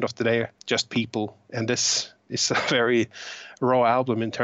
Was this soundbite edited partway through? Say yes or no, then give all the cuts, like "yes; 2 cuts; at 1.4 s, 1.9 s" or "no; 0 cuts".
no; 0 cuts